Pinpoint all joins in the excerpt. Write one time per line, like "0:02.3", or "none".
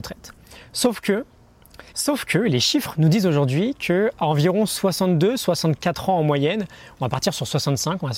0:01.9